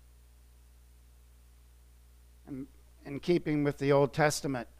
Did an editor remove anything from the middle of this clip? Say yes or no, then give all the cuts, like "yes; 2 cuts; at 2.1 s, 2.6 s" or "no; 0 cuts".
no; 0 cuts